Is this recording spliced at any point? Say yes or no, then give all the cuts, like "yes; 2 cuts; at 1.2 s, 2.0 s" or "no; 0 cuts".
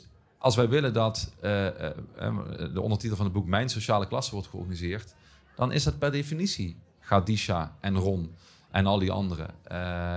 no; 0 cuts